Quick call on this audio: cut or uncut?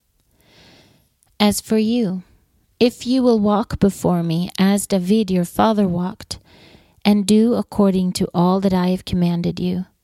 uncut